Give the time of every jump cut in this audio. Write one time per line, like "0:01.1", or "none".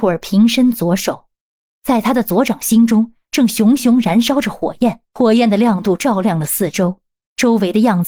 0:05.0

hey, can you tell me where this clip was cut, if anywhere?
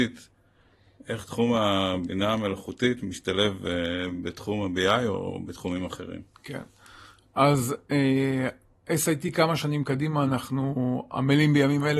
none

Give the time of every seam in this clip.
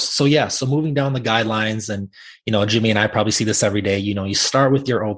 none

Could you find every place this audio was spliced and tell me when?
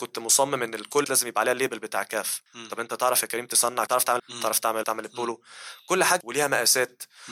0:01.0
0:02.5
0:03.9
0:04.2
0:04.8
0:06.2

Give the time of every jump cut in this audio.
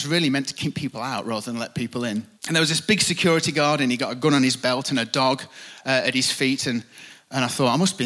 0:02.4

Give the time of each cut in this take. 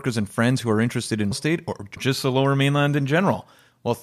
0:01.3
0:02.0

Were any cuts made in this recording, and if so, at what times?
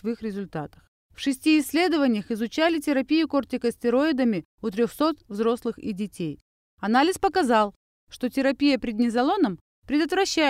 none

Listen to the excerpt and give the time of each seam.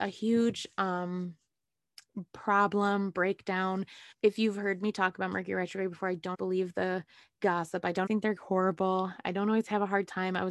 0:04.1
0:06.3
0:08.1

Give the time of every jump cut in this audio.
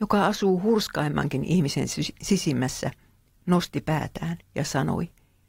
none

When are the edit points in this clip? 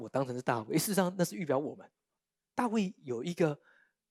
none

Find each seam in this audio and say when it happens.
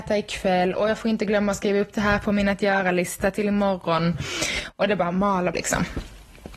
0:05.5

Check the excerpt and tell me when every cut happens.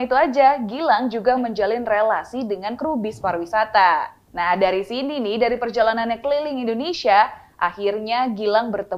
0:01.4
0:02.8

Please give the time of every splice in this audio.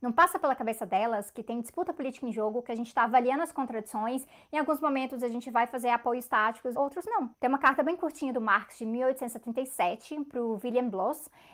0:06.7

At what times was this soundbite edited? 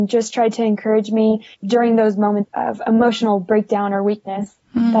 0:01.5
0:02.4

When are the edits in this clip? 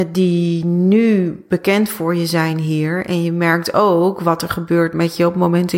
none

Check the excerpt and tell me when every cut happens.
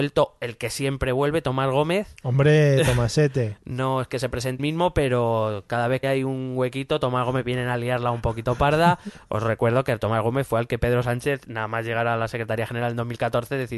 0:04.6
0:06.0

